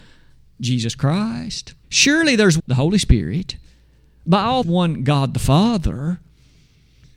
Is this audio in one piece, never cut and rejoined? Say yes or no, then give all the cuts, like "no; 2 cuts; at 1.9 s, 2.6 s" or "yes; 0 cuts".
no; 3 cuts; at 1.8 s, 2.6 s, 4.6 s